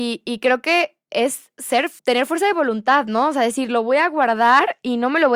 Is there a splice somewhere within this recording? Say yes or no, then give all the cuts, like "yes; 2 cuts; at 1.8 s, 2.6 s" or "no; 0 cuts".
yes; 1 cut; at 2.0 s